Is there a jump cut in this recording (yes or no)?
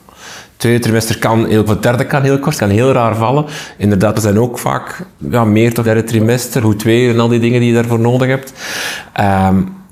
yes